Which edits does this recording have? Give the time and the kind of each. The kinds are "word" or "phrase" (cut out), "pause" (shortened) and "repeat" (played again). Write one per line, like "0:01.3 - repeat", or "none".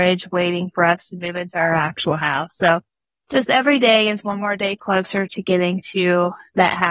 none